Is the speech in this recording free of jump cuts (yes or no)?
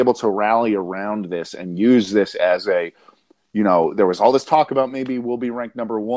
yes